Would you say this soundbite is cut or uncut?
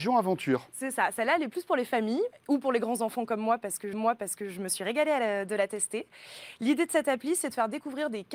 cut